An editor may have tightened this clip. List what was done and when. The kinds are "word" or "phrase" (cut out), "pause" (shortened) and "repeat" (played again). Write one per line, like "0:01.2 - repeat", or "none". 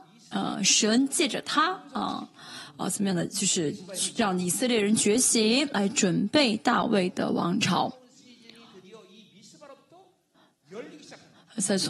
none